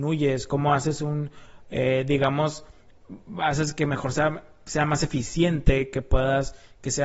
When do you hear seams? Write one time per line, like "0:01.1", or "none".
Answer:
none